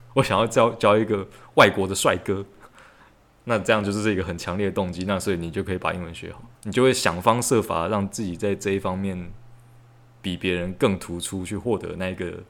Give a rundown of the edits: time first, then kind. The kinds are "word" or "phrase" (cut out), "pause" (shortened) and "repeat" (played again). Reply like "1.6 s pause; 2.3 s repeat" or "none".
6.5 s pause